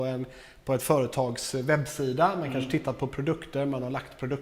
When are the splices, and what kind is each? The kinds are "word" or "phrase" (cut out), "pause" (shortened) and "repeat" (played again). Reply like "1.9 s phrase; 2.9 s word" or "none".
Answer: none